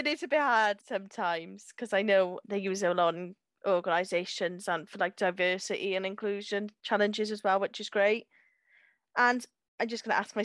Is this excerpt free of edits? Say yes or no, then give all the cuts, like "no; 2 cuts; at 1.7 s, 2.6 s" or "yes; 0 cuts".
yes; 0 cuts